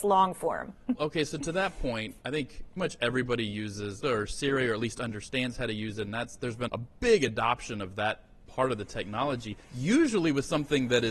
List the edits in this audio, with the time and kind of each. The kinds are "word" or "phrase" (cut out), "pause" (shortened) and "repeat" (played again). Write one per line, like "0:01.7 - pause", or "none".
0:00.9 - word
0:02.8 - word
0:04.0 - word
0:06.7 - word
0:09.6 - pause